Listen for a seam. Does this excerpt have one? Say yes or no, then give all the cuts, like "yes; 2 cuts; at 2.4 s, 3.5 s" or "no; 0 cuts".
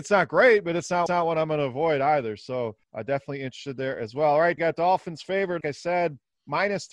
yes; 4 cuts; at 1.1 s, 2.8 s, 4.6 s, 5.6 s